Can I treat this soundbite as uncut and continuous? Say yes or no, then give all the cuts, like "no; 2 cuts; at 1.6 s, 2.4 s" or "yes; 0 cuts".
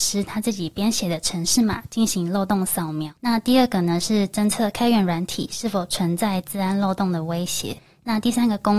no; 1 cut; at 3.2 s